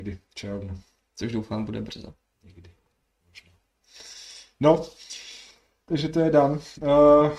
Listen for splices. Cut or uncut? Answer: uncut